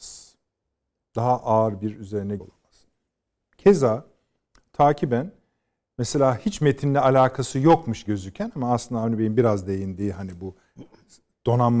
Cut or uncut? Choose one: cut